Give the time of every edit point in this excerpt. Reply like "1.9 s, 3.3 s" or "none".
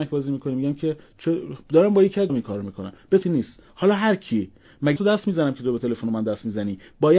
2.3 s, 3.2 s, 5.0 s